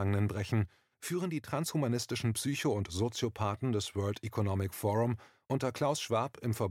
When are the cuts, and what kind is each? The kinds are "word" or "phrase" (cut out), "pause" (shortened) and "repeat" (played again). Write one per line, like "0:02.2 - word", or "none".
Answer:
none